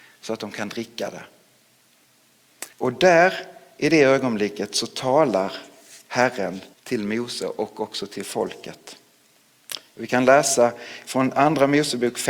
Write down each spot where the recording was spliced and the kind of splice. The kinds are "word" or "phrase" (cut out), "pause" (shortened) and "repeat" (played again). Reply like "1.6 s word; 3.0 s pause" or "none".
2.7 s pause; 6.7 s pause